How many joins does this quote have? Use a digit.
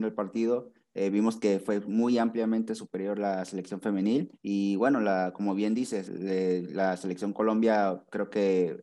2